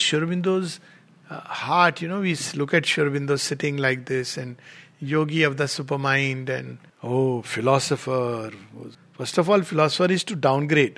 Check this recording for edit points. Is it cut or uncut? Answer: cut